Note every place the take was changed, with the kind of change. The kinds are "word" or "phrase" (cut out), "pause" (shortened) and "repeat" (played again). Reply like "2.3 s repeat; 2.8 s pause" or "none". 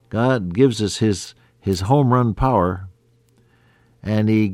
none